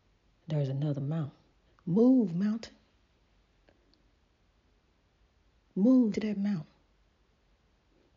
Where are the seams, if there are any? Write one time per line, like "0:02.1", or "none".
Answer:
0:01.5
0:06.1